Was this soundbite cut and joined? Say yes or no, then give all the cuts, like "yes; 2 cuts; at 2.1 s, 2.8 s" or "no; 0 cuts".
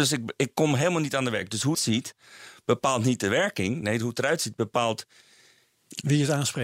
yes; 1 cut; at 1.7 s